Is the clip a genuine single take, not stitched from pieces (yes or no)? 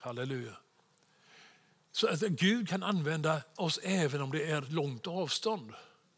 yes